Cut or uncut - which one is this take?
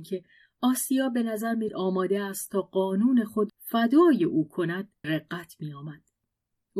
cut